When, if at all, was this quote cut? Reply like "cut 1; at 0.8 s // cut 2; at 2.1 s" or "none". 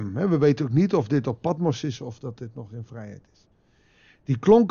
none